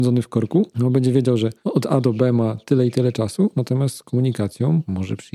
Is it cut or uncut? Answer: uncut